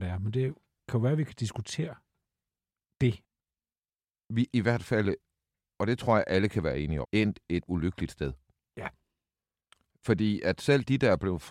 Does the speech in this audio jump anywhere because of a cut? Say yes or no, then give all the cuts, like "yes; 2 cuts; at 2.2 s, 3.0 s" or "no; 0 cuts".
yes; 3 cuts; at 4.5 s, 7.0 s, 7.6 s